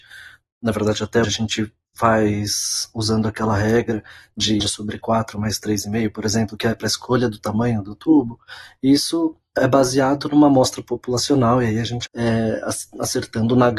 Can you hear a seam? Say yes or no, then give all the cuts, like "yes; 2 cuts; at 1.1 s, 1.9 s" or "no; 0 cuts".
yes; 4 cuts; at 1.2 s, 4.6 s, 9.6 s, 12.1 s